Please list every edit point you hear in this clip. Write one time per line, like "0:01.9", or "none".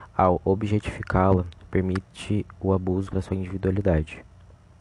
0:03.1